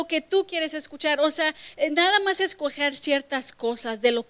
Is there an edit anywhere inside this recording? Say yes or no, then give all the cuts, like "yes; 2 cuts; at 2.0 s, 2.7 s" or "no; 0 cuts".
no; 0 cuts